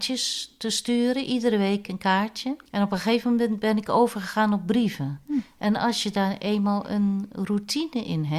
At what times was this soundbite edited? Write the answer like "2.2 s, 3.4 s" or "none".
2.7 s